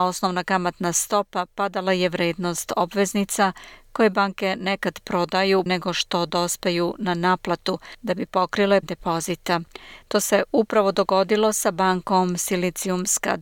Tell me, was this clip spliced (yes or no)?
yes